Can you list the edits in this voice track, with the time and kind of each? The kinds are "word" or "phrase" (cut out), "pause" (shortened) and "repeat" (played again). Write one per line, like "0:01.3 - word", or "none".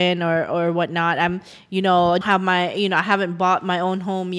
0:02.2 - word